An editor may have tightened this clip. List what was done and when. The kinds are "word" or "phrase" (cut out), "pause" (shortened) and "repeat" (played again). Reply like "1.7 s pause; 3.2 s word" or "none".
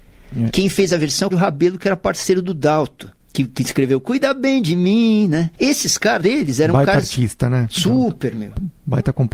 1.3 s word; 3.2 s pause; 5.6 s pause; 6.2 s word